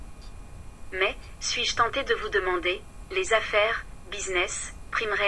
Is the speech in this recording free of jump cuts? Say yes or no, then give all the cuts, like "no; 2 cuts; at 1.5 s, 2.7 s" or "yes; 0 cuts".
yes; 0 cuts